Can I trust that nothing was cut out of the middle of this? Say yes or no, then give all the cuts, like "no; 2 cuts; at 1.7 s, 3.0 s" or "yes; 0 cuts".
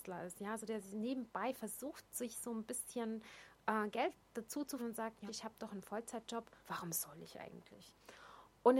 no; 3 cuts; at 4.8 s, 5.3 s, 6.6 s